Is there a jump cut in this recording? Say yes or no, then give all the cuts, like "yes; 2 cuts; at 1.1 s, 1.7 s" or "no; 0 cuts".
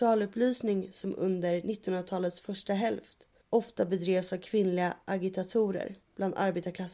yes; 1 cut; at 3.4 s